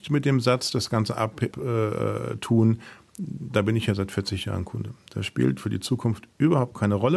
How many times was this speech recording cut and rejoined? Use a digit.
1